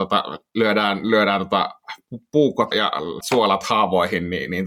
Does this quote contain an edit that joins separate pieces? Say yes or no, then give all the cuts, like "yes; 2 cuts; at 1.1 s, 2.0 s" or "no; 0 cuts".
yes; 2 cuts; at 2.7 s, 3.2 s